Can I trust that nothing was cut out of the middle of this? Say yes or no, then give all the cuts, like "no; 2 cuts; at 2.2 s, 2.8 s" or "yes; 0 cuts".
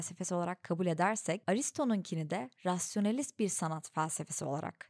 yes; 0 cuts